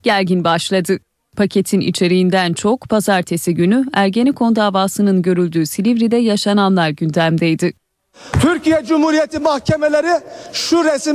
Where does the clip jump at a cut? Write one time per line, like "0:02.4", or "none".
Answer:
none

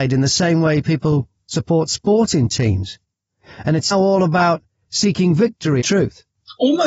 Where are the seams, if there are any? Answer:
0:03.9
0:05.8

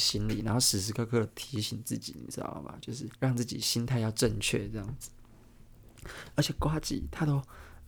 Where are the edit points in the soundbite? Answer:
0:03.2

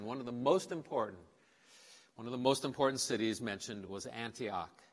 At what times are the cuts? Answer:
none

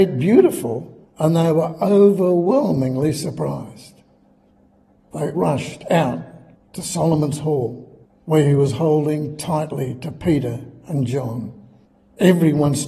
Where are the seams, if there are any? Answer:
0:05.3

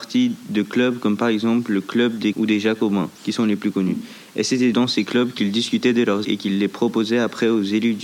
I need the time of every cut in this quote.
0:02.3
0:03.2
0:04.7
0:06.2

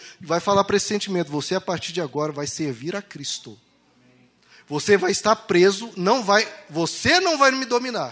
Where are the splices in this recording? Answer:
none

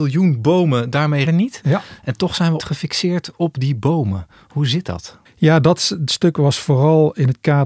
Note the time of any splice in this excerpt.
0:01.2
0:02.6
0:05.3

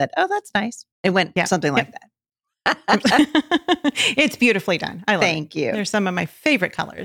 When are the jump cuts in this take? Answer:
0:00.9

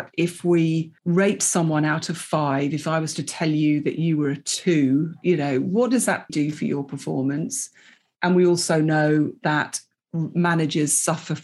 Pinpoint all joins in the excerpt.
0:01.0
0:06.3
0:08.1

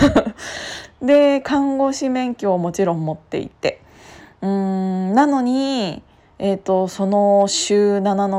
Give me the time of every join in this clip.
none

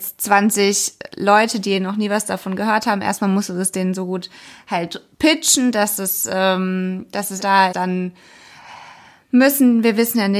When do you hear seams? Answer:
0:05.1
0:07.4
0:07.7

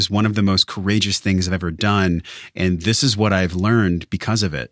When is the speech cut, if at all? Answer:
none

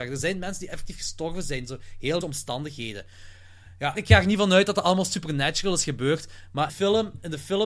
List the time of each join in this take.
0:02.2
0:03.9
0:06.7

